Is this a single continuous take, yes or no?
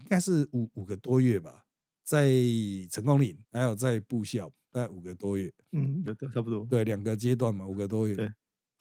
no